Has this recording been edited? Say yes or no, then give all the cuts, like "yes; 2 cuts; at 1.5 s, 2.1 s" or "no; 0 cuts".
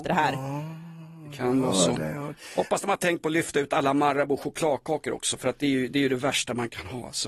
no; 0 cuts